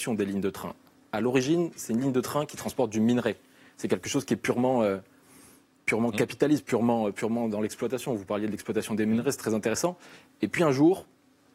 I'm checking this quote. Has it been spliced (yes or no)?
no